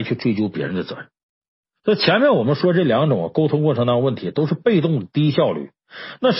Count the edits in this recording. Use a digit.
1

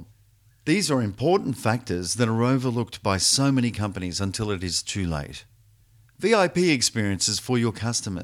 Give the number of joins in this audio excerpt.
0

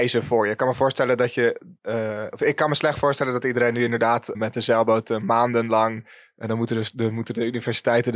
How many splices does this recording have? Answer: 2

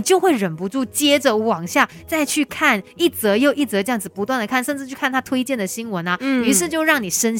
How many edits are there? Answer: 0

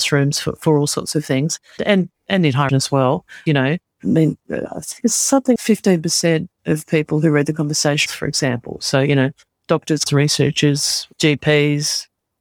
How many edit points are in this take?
7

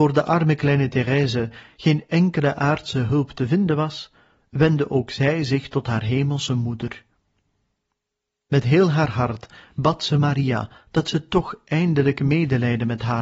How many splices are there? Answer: 0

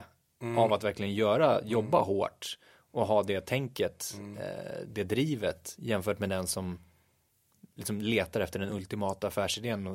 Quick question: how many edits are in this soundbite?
0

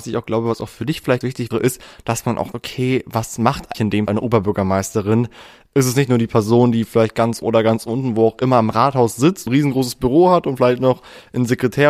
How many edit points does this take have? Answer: 7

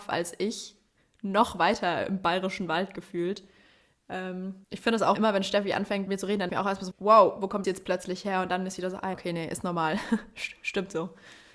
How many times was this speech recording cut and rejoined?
7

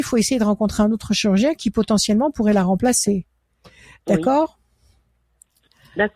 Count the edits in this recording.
0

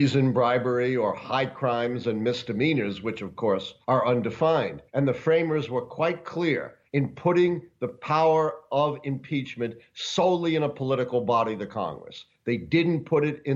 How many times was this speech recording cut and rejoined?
3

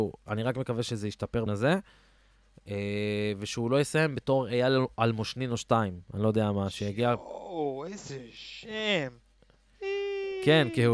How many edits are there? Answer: 1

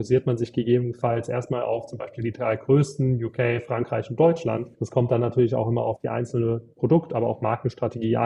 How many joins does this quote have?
1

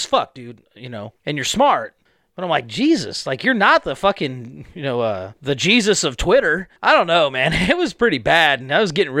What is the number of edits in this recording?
4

